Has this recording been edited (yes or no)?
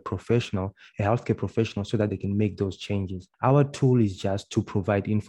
yes